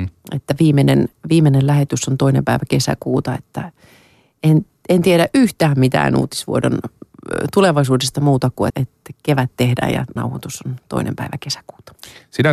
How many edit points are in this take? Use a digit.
2